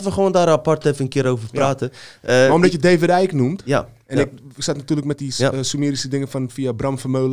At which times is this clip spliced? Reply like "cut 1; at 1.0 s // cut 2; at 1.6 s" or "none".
none